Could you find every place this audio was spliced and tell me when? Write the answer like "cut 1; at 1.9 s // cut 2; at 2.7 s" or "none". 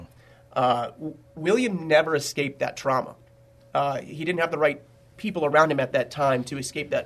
none